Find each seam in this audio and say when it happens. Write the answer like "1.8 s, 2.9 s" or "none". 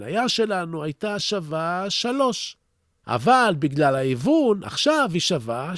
none